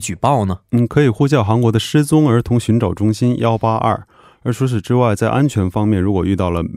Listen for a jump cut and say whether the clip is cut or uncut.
uncut